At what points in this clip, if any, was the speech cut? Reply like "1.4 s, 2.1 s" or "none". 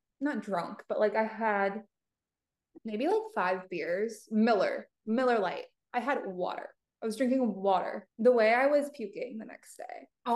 2.8 s, 6.8 s, 8.1 s

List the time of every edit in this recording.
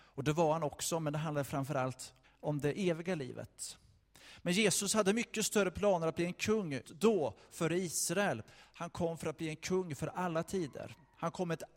2.2 s, 6.8 s

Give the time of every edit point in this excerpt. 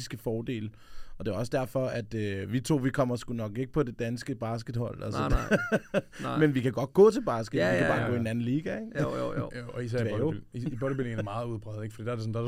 none

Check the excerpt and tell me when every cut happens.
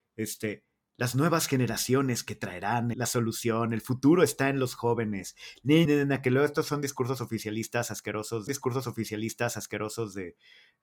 2.9 s, 5.9 s, 8.5 s

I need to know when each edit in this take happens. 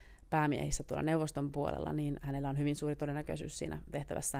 none

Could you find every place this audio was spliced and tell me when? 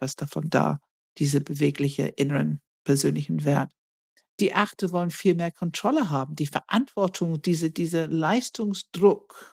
3.9 s

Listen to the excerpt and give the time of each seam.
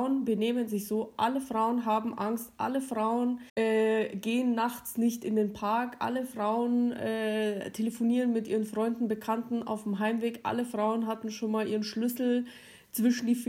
3.5 s

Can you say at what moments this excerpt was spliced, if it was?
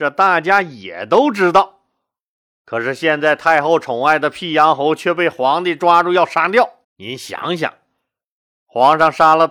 6.8 s

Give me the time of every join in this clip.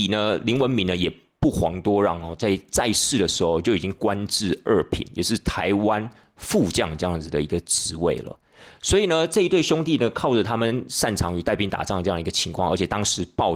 none

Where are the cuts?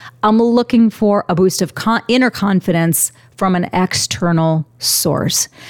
none

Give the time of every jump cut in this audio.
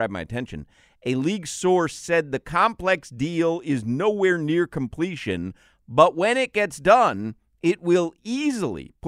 none

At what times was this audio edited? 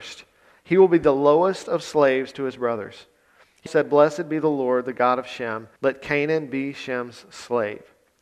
3.7 s, 5.8 s

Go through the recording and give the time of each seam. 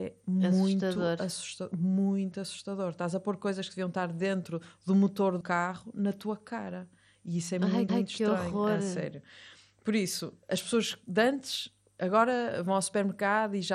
5.4 s, 7.9 s, 10.4 s

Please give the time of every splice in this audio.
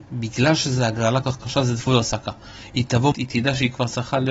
1.2 s, 1.9 s, 3.1 s

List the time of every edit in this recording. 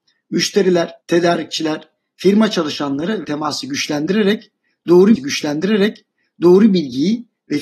1.0 s, 3.2 s, 5.2 s

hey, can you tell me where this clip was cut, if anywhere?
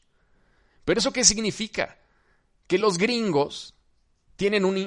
none

